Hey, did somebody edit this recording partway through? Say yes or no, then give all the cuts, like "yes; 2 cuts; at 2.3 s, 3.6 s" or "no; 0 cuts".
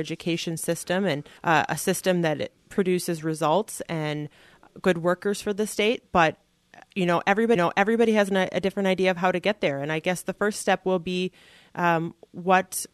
yes; 2 cuts; at 1.4 s, 7.6 s